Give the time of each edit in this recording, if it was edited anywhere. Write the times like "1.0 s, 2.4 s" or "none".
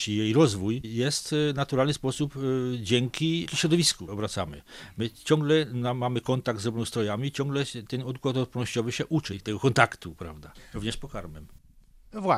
4.1 s